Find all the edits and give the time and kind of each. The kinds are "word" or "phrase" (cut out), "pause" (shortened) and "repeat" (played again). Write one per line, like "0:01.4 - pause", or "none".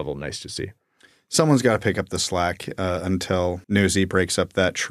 0:03.6 - pause